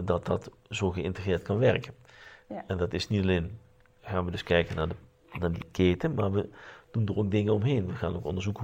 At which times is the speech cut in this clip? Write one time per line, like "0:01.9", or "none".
none